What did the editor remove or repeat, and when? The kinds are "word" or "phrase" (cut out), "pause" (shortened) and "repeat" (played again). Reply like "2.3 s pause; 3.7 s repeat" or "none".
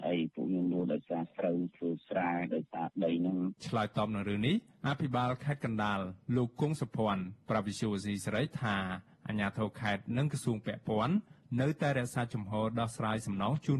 3.6 s pause